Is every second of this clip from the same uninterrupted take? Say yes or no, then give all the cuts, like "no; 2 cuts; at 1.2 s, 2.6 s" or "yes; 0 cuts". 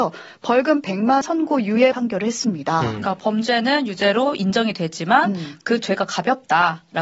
no; 2 cuts; at 1.2 s, 1.9 s